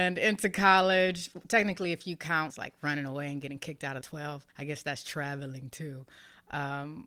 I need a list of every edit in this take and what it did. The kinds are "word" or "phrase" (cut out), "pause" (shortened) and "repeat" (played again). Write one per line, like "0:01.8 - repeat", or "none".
0:02.5 - phrase
0:04.0 - phrase
0:04.5 - pause